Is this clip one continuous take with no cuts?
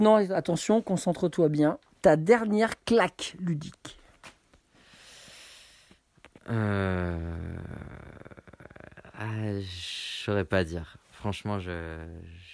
yes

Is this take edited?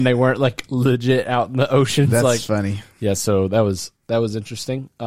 no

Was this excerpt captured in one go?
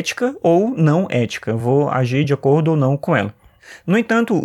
yes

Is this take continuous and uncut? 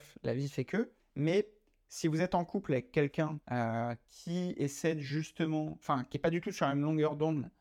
no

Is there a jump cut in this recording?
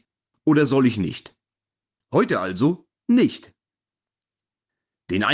no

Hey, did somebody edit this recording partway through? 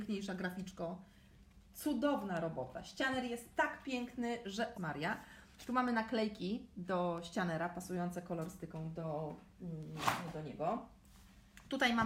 yes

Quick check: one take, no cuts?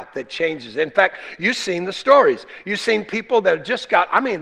yes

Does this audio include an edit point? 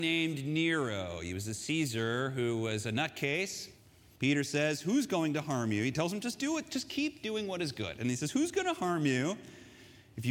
no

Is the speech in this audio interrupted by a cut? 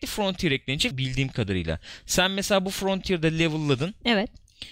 yes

